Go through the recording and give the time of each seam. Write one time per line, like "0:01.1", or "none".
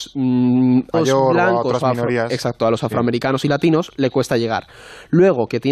0:00.9